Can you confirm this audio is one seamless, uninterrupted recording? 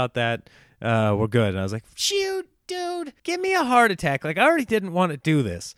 no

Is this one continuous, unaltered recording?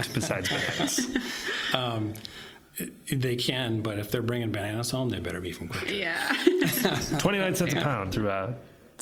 no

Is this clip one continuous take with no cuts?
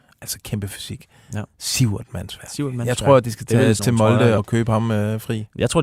no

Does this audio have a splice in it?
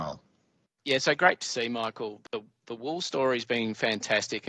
no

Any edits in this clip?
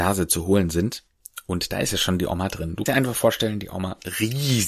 yes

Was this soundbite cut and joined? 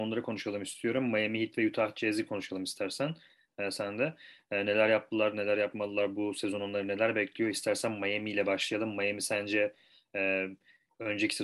no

